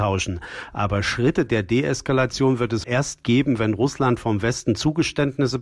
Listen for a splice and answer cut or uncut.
cut